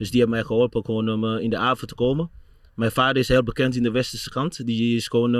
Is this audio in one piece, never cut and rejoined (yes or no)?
yes